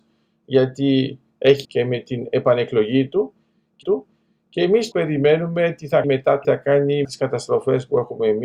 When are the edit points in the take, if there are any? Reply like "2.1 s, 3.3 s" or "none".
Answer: 1.6 s, 3.8 s, 4.9 s, 6.0 s, 6.4 s, 7.0 s